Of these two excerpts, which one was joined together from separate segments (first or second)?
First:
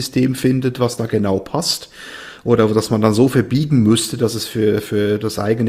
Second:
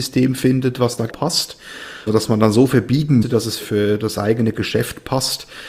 second